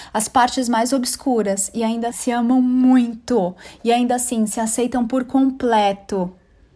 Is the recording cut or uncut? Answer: cut